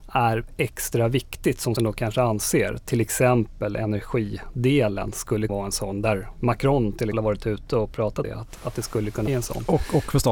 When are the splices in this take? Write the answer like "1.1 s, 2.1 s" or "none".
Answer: 1.8 s, 5.5 s, 7.1 s, 8.2 s, 9.3 s